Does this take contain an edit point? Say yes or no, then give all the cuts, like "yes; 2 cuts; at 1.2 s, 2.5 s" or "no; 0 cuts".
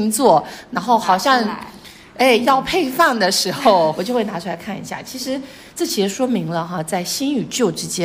yes; 1 cut; at 3.9 s